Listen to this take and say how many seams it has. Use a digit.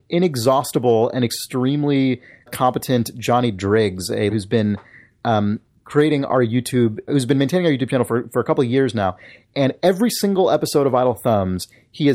3